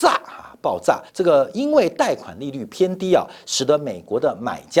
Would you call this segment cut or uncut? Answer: cut